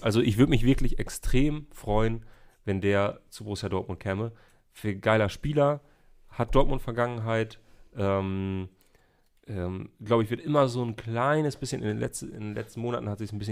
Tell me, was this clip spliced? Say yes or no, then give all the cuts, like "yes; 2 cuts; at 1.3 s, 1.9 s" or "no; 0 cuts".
no; 0 cuts